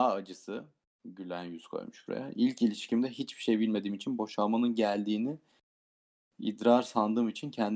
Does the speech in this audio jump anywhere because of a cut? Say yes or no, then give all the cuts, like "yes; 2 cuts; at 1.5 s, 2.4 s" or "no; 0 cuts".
no; 0 cuts